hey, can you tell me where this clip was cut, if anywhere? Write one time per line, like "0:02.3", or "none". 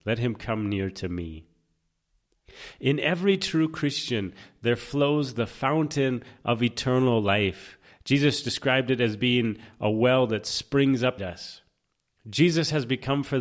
0:11.2